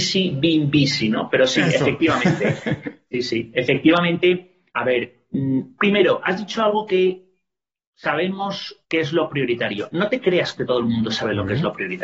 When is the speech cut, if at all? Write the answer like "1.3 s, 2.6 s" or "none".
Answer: 4.7 s, 8.8 s